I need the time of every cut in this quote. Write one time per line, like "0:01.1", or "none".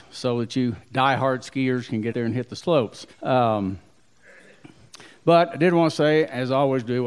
0:02.1
0:03.1